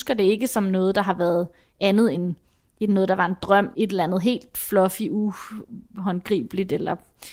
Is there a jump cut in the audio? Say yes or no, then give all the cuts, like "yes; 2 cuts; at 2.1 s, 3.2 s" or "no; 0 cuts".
yes; 2 cuts; at 2.1 s, 3.7 s